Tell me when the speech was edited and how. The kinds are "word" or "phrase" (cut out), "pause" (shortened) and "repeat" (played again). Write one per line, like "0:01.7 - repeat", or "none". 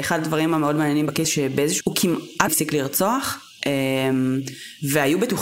0:01.2 - word
0:01.8 - word
0:02.5 - word